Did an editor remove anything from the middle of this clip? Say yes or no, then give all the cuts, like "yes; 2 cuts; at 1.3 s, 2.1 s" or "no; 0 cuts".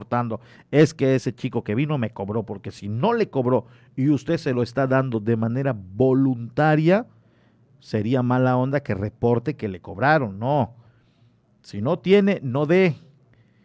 no; 0 cuts